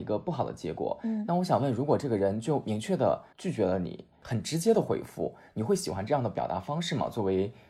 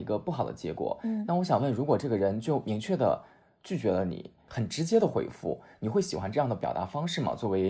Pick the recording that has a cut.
first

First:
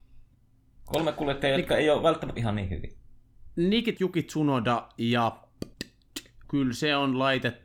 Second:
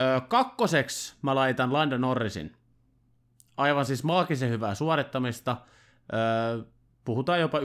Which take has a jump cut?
first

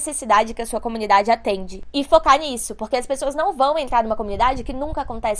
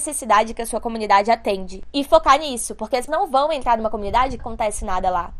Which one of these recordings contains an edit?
second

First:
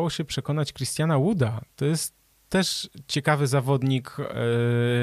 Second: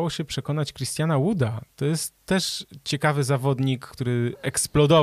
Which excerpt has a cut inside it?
second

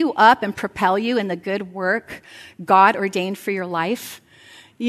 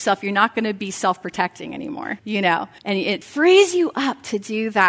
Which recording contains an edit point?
second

